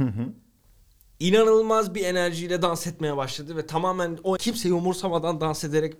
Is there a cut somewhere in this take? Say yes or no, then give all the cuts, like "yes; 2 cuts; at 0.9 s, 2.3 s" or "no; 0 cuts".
yes; 1 cut; at 4.4 s